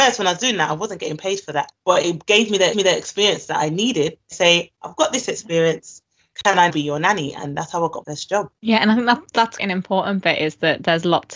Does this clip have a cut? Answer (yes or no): yes